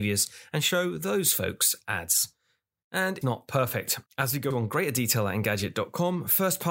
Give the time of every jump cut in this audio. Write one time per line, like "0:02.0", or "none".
0:03.2
0:04.1
0:04.5